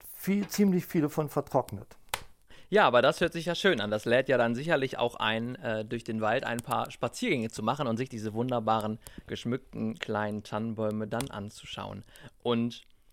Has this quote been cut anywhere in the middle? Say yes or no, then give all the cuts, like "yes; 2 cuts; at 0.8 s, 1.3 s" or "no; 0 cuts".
no; 0 cuts